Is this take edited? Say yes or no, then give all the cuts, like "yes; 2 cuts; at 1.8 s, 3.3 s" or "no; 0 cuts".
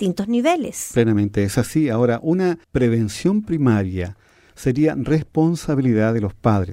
yes; 1 cut; at 2.6 s